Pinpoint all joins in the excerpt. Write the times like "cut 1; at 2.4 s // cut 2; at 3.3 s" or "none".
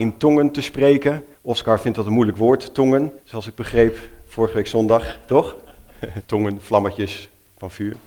cut 1; at 1.3 s // cut 2; at 3.2 s // cut 3; at 6.2 s